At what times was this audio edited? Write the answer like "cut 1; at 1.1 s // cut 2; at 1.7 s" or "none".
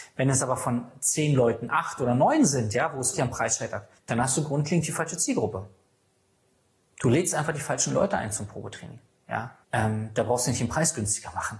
cut 1; at 3.1 s // cut 2; at 4.0 s // cut 3; at 9.6 s